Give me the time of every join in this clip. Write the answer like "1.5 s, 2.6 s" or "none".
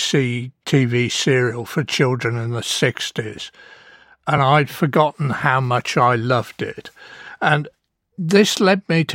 none